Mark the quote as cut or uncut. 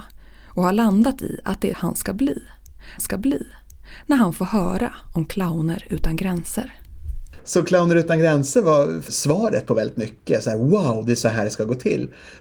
cut